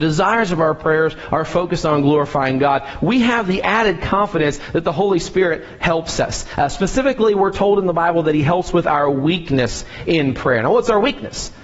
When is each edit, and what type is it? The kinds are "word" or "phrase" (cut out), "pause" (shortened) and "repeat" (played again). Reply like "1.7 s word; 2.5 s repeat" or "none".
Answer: none